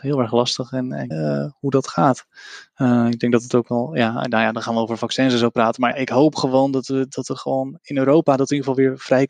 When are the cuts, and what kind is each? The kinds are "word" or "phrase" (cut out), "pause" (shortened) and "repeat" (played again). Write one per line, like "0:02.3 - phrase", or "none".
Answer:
0:01.1 - word
0:05.9 - word